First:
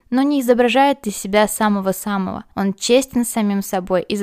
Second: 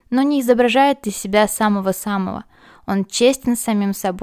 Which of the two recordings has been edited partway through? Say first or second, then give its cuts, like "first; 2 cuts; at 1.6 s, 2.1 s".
first; 1 cut; at 2.5 s